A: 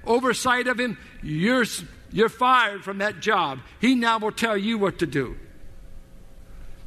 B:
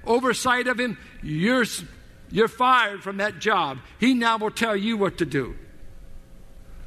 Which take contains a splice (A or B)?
A